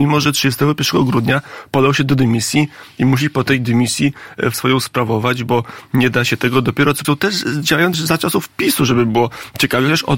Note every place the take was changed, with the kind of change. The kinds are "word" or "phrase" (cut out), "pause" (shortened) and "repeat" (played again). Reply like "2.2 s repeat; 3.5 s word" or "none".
4.5 s word; 7.0 s phrase; 7.9 s word

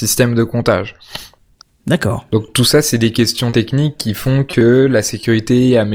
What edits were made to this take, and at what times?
none

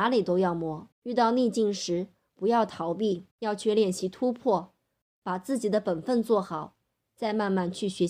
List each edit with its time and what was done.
0.9 s pause; 3.3 s pause

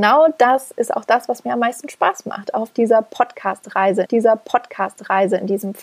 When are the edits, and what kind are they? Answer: 4.1 s repeat

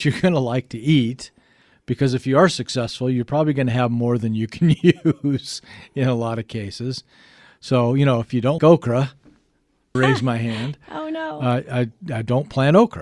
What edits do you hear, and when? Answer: 8.6 s word; 9.9 s word

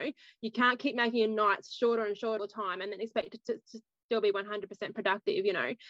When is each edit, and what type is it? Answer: 2.4 s word; 3.4 s word

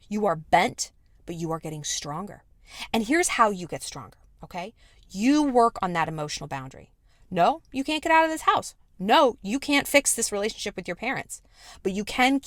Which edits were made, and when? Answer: none

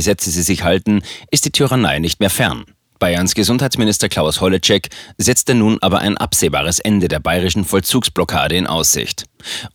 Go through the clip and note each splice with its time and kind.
none

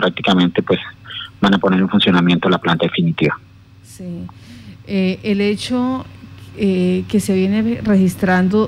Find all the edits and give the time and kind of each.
none

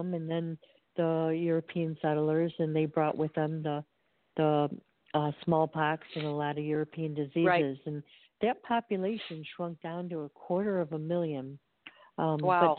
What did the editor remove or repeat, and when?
none

